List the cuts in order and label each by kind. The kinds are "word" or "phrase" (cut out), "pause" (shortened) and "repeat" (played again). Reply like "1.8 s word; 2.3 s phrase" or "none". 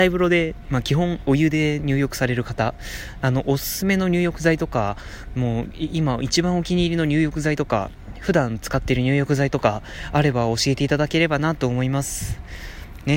none